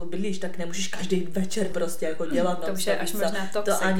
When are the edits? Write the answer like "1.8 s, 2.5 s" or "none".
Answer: 1.7 s